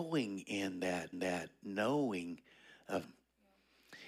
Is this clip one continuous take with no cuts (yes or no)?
no